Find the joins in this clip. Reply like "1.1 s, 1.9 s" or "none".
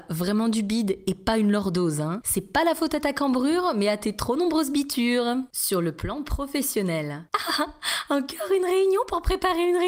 none